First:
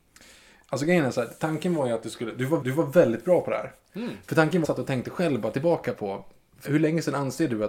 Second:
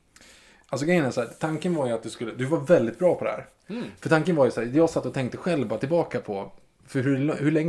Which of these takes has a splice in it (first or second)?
first